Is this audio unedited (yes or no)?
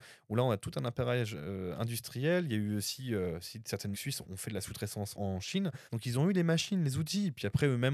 no